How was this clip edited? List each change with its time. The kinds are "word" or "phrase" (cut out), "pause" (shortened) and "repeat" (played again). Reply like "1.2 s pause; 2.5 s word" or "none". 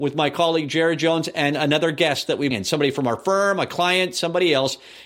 2.5 s word